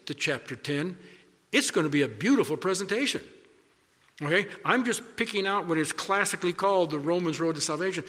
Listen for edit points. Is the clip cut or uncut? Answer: uncut